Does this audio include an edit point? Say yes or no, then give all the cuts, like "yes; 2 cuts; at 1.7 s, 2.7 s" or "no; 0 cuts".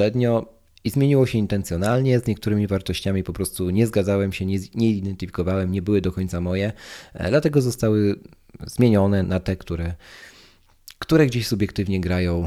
yes; 1 cut; at 9.2 s